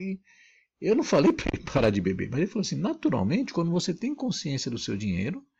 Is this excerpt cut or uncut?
uncut